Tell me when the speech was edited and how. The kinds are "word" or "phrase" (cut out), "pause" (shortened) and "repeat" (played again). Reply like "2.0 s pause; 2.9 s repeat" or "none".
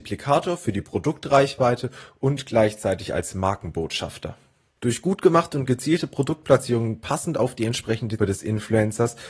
8.2 s word